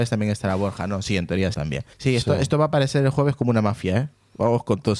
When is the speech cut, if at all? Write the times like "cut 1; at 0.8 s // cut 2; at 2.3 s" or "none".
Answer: cut 1; at 1.5 s // cut 2; at 1.9 s